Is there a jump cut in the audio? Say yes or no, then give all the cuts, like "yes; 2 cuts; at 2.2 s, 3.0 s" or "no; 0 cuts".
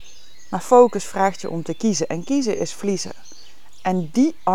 no; 0 cuts